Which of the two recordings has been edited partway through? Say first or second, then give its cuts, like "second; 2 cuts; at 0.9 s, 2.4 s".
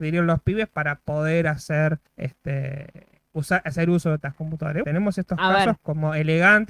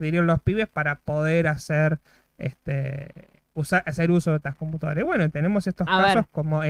first; 2 cuts; at 2.1 s, 4.8 s